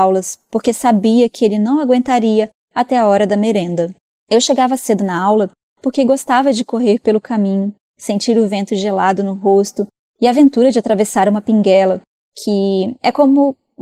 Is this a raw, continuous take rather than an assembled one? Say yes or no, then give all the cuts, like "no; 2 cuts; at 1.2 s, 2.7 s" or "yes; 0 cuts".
yes; 0 cuts